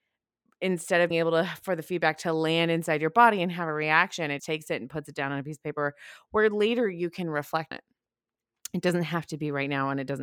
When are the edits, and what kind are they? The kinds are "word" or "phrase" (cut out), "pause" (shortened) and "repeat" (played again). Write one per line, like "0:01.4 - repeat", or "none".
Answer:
0:01.1 - word
0:04.4 - word
0:07.7 - word

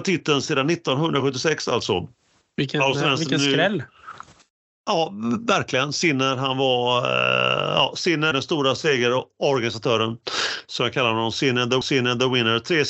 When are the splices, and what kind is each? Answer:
0:08.3 - word
0:11.8 - repeat

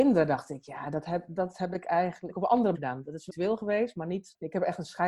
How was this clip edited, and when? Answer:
0:02.3 - word
0:02.7 - word
0:03.3 - phrase

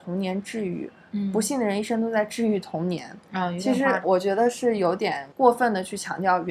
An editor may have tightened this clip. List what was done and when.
0:04.0 - word
0:05.3 - pause

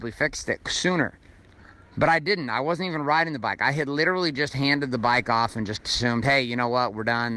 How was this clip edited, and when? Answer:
none

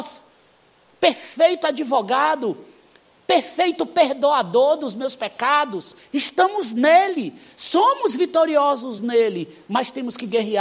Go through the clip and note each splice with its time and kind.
none

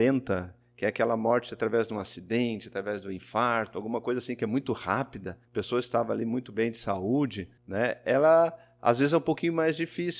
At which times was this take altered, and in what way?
0:05.4 - pause
0:07.6 - pause

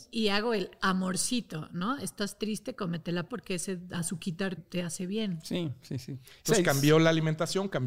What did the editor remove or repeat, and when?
0:03.3 - word
0:04.6 - word

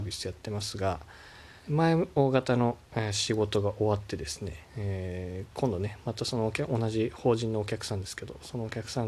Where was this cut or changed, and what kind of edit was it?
0:01.6 - pause
0:04.7 - pause

